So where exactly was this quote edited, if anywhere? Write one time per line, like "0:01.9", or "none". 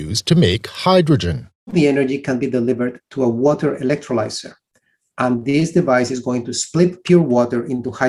none